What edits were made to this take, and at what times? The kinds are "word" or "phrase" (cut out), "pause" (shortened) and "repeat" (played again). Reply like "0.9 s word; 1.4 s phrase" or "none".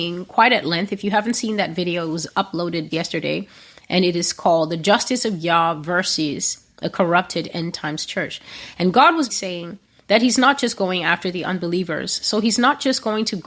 2.9 s word; 9.3 s word